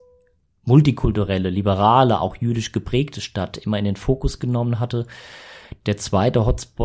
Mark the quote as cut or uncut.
uncut